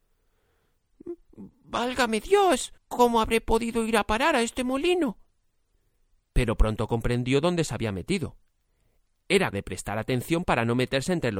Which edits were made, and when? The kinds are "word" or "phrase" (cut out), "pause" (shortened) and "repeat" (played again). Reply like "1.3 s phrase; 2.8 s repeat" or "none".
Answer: 2.8 s pause; 5.8 s pause; 9.5 s word